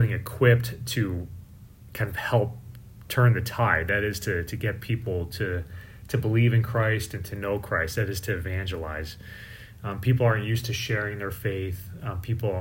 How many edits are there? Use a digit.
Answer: 0